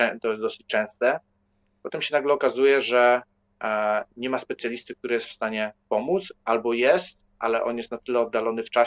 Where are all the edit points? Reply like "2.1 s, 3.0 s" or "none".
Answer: none